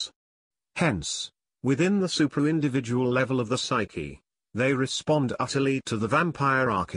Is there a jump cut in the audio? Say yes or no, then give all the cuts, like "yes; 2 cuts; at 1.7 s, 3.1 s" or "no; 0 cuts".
no; 0 cuts